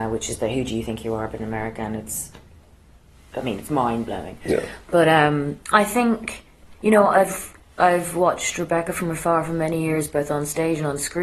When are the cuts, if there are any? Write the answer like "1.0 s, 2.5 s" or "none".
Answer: 5.6 s